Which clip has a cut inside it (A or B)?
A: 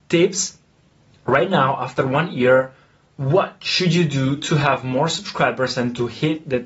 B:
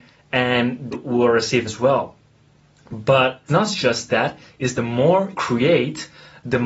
B